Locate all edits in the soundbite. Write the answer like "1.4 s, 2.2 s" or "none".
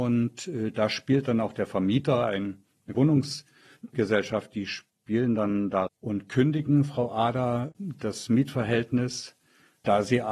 2.9 s, 5.9 s